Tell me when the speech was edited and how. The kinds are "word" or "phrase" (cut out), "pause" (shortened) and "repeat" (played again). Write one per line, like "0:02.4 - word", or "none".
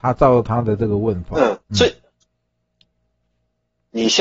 0:01.6 - pause